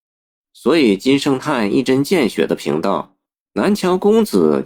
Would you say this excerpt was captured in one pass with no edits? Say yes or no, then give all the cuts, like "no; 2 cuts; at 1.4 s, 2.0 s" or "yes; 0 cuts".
no; 1 cut; at 3.3 s